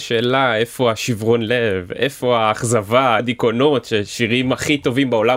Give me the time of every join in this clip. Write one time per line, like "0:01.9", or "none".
0:03.2